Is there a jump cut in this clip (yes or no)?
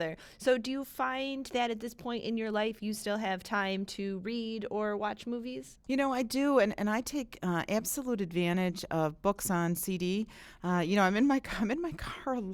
yes